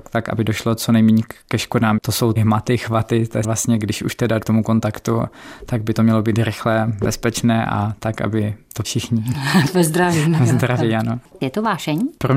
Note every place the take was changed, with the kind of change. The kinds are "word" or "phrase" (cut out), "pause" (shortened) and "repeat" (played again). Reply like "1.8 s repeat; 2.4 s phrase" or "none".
2.4 s word; 3.4 s word; 4.4 s word; 8.8 s word